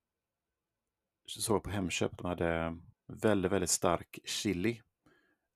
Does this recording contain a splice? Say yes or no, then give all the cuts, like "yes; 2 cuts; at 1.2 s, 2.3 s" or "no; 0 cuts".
yes; 1 cut; at 2.9 s